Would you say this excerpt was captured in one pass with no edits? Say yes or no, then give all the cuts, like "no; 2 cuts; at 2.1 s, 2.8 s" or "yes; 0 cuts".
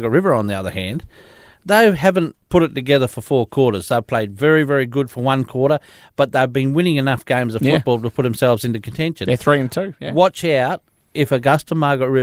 no; 1 cut; at 2.4 s